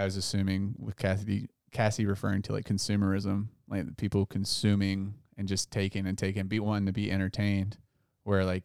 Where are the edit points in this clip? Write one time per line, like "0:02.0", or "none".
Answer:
none